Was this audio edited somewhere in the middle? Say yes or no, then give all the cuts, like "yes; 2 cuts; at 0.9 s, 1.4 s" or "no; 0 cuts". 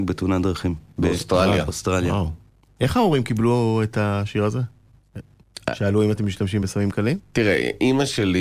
no; 0 cuts